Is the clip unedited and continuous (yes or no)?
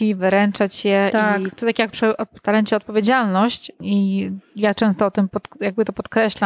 no